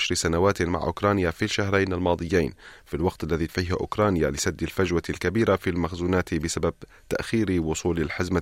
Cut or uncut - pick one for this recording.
cut